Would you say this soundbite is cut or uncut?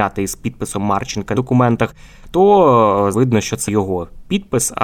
cut